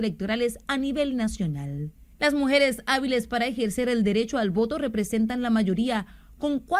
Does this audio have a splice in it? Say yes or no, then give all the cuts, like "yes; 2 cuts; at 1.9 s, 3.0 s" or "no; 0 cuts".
yes; 1 cut; at 2.1 s